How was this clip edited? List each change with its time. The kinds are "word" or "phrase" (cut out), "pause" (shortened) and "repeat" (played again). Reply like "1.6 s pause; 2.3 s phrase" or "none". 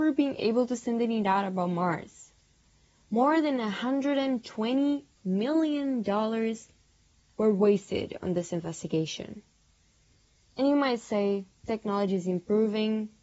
none